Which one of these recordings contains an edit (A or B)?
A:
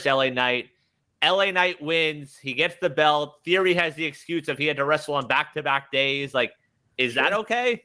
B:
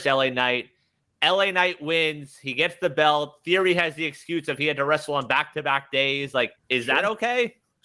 B